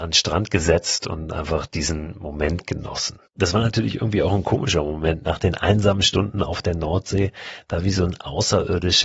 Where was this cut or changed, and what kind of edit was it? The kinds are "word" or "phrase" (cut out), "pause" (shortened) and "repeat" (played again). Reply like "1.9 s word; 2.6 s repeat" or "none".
3.3 s pause